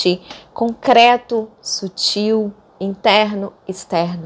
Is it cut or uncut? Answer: uncut